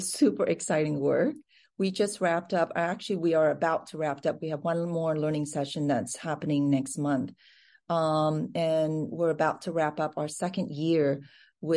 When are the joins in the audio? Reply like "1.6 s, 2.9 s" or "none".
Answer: none